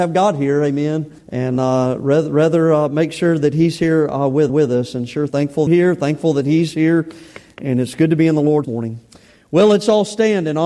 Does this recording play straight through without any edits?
no; 5 cuts; at 1.2 s, 4.5 s, 5.3 s, 5.7 s, 8.6 s

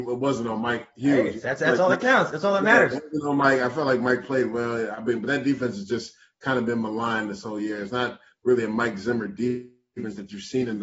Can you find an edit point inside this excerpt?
no; 0 cuts

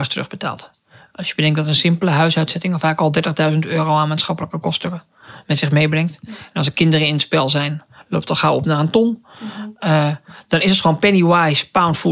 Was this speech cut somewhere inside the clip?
no; 0 cuts

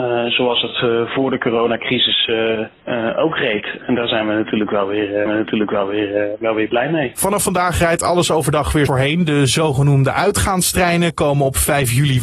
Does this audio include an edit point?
yes; 3 cuts; at 2.8 s, 5.3 s, 8.9 s

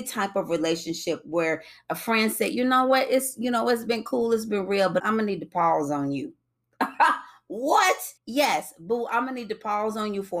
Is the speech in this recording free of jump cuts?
no; 2 cuts; at 5.0 s, 8.2 s

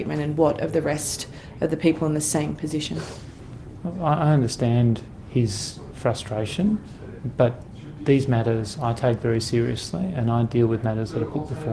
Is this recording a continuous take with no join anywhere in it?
yes; 0 cuts

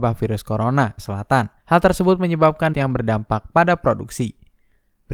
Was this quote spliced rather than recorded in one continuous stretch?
yes; 3 cuts; at 1.0 s, 1.6 s, 2.7 s

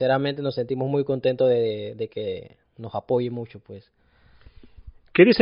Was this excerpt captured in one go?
yes; 0 cuts

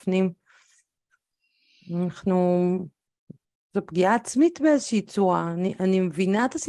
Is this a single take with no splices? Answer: yes; 0 cuts

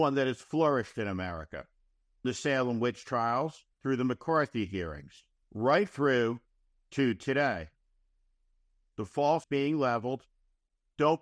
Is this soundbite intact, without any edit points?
no; 4 cuts; at 2.2 s, 3.7 s, 5.4 s, 9.4 s

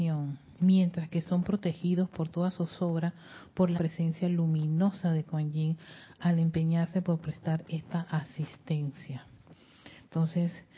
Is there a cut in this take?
yes; 1 cut; at 3.8 s

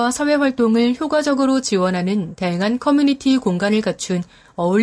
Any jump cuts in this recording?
no; 0 cuts

